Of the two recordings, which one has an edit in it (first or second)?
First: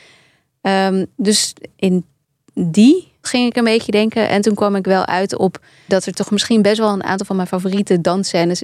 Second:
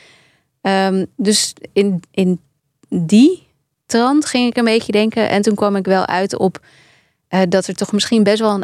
first